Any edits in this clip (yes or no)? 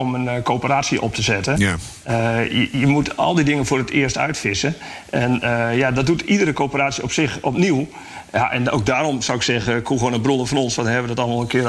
no